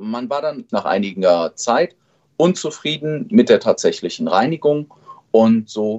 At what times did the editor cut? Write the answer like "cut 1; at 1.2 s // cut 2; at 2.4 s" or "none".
none